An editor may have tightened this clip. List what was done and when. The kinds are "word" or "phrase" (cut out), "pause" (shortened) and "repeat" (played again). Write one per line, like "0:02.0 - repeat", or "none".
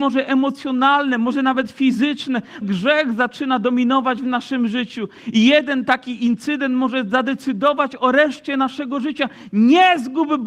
0:02.6 - word